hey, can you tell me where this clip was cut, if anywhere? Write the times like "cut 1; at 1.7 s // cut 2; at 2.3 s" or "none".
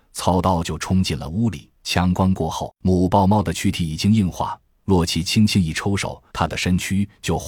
cut 1; at 1.8 s // cut 2; at 6.3 s